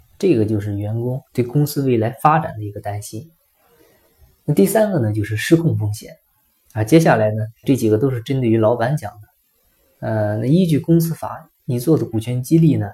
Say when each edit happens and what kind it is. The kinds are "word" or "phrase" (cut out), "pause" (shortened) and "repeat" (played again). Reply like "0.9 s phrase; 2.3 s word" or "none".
1.2 s pause; 7.6 s word